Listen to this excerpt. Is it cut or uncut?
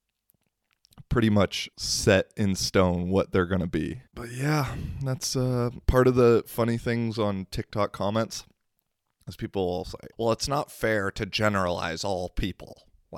cut